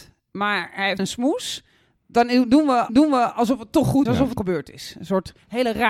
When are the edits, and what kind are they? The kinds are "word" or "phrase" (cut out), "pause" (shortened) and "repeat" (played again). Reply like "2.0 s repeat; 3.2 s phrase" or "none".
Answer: 1.0 s phrase; 2.9 s repeat; 4.1 s word; 4.4 s word